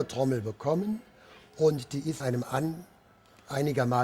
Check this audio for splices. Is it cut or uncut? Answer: cut